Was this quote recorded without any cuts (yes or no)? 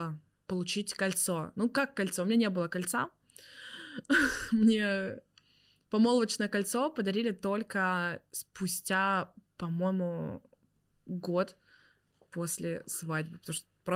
yes